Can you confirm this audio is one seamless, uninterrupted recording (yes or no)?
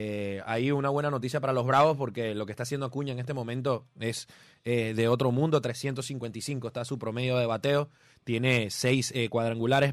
yes